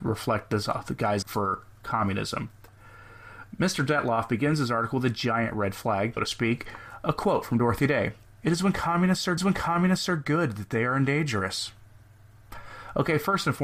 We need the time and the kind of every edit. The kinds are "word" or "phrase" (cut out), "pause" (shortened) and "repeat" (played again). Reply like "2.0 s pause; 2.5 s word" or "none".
1.2 s word; 6.2 s word; 8.3 s pause; 9.4 s repeat